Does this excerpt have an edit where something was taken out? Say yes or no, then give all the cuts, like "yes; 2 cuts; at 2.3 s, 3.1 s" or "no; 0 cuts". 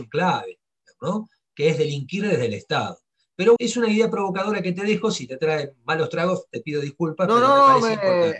yes; 1 cut; at 3.6 s